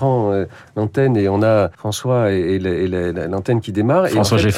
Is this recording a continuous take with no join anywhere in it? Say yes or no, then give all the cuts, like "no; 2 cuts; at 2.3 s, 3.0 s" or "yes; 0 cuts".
no; 1 cut; at 1.7 s